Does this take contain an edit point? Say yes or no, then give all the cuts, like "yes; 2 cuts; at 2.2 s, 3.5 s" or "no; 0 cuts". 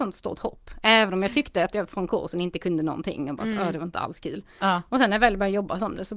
no; 0 cuts